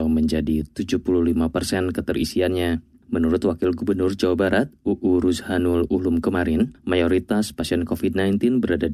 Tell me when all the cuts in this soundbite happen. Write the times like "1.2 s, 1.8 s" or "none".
none